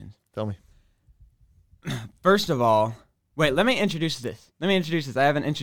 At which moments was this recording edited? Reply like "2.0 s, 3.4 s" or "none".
none